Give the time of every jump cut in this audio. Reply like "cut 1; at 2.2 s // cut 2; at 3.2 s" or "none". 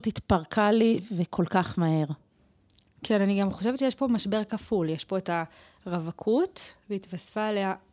none